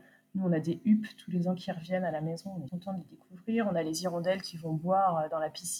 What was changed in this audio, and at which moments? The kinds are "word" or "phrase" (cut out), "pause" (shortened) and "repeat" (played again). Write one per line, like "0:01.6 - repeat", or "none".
0:02.7 - word